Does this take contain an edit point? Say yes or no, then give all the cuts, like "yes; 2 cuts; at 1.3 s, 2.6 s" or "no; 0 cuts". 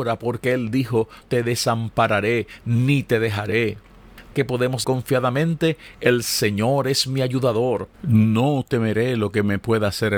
yes; 4 cuts; at 1.2 s, 4.3 s, 4.8 s, 7.9 s